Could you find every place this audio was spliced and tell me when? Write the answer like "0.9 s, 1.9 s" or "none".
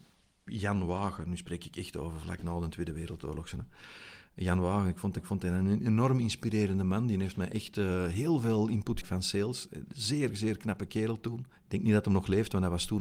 5.2 s, 9.0 s, 11.5 s